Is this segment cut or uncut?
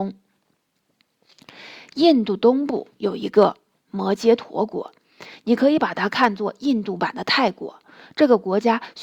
uncut